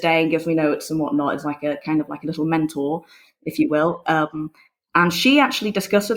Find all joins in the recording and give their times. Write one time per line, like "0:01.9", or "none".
none